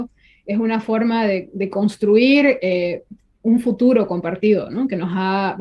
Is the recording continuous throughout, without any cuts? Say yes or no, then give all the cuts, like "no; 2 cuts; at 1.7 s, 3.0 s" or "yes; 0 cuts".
yes; 0 cuts